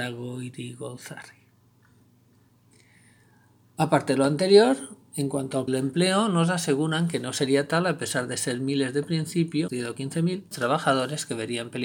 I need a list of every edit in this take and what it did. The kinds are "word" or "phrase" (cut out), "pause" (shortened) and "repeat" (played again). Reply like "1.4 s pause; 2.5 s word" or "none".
5.7 s phrase; 9.7 s word; 10.5 s word